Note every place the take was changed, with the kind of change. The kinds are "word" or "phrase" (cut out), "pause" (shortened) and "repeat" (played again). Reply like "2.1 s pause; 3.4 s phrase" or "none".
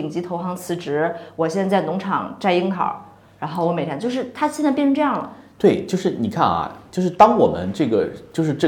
none